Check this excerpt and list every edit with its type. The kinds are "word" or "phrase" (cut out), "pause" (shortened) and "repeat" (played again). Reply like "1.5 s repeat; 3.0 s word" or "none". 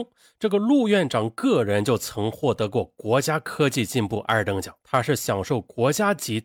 4.8 s pause